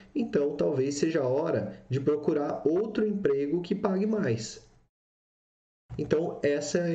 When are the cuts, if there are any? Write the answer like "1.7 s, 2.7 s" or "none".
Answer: none

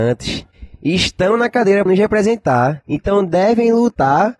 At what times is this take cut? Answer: 1.9 s

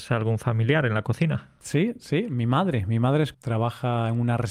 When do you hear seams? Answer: 3.3 s

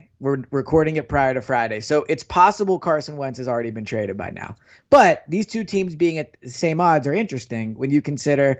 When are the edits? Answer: none

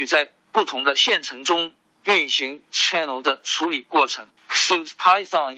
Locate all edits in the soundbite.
2.7 s, 4.4 s

